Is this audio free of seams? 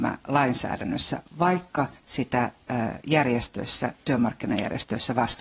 no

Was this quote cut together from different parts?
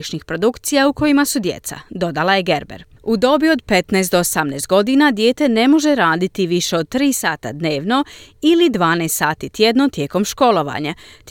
no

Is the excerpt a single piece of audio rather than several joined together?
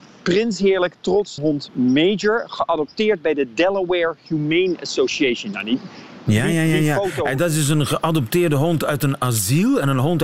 no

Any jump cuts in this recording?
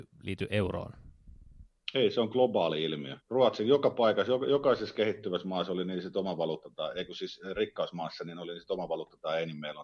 yes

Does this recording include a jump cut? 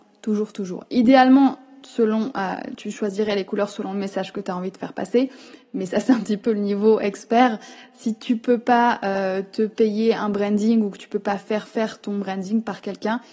no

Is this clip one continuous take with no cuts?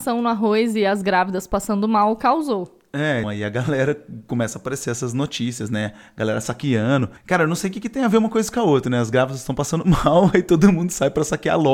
no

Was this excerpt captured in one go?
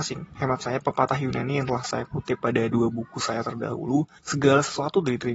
no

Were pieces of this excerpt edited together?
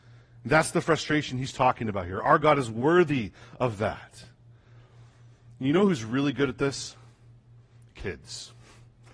no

